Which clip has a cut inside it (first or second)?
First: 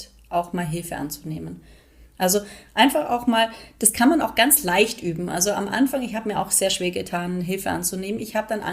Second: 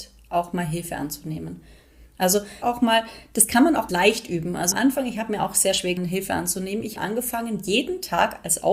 second